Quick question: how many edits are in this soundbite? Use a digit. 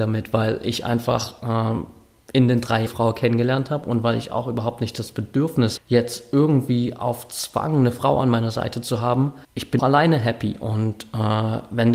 4